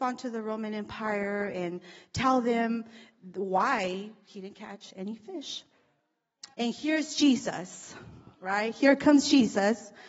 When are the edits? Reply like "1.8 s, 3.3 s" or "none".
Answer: 6.5 s, 8.3 s